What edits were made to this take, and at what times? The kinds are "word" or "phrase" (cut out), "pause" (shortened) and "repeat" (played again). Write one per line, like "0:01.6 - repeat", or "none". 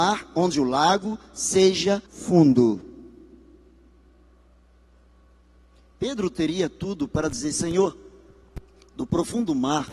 0:02.1 - word